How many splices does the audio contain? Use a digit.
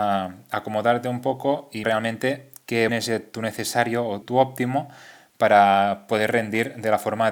3